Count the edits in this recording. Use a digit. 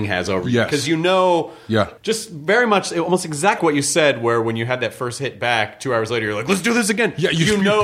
2